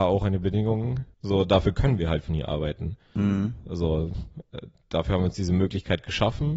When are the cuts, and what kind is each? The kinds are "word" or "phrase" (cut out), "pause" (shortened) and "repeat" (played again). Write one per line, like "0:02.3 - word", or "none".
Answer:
0:01.1 - pause